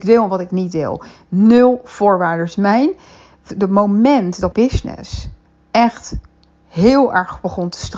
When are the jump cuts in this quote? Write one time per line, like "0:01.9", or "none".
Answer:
0:04.5
0:05.4